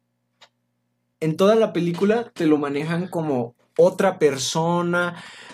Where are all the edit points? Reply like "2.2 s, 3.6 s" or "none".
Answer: 1.1 s